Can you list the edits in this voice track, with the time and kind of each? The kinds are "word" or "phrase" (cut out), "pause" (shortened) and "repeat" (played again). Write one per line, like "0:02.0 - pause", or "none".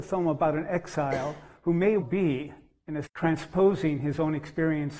0:02.0 - word
0:03.0 - word

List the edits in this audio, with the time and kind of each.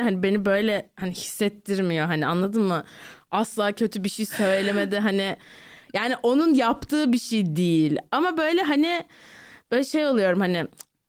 none

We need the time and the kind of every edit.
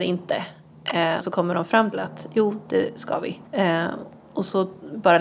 0:01.2 - phrase
0:01.9 - word
0:03.5 - pause

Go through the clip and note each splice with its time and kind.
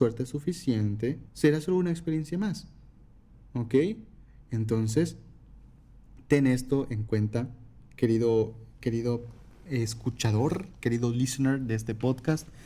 0:01.3 - pause

